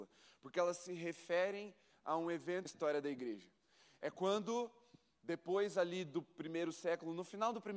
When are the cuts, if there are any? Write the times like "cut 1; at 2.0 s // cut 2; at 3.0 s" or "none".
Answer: cut 1; at 2.7 s